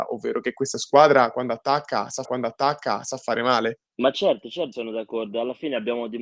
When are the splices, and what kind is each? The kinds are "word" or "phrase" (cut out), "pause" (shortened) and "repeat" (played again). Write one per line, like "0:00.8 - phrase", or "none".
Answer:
0:02.2 - repeat
0:03.9 - pause
0:04.7 - word